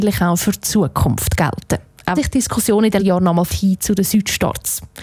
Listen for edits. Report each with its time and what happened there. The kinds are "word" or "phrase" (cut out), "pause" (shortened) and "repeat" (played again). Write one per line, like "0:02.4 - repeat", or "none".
0:02.2 - word
0:03.0 - word
0:03.5 - phrase